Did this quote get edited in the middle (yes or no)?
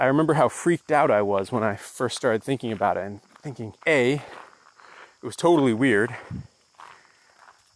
yes